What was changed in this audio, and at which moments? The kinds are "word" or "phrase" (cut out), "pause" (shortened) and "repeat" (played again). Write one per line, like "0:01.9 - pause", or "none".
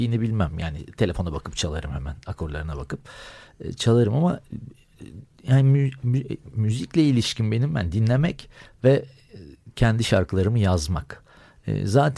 none